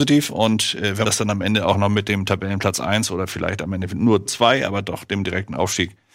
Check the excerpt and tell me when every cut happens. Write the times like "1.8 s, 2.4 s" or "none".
1.0 s, 4.3 s